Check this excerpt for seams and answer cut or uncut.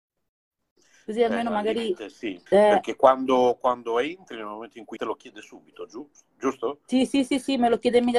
cut